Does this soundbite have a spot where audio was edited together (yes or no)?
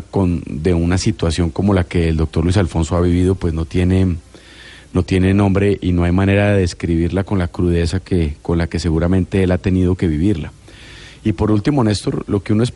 no